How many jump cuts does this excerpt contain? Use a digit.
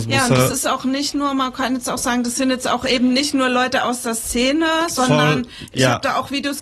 0